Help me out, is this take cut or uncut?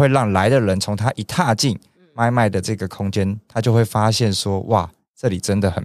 uncut